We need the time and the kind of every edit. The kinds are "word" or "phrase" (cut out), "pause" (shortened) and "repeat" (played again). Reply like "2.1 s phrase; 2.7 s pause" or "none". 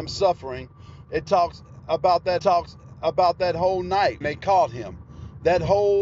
2.4 s repeat; 4.2 s word